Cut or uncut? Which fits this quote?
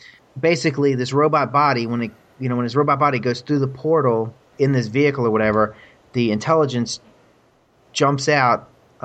uncut